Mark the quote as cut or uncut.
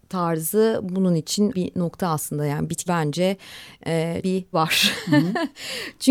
cut